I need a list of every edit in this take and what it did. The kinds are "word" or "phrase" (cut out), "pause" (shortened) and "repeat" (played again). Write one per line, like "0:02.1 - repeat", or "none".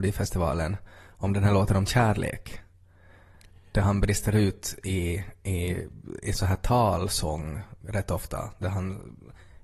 none